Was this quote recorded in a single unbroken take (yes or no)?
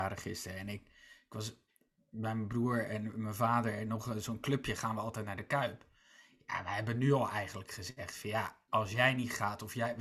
yes